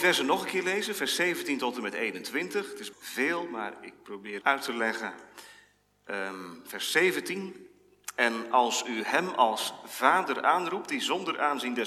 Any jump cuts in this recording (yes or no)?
yes